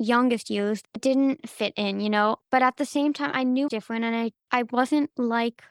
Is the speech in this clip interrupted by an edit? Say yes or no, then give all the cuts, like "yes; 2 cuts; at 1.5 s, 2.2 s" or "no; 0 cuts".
yes; 3 cuts; at 1.0 s, 3.7 s, 4.4 s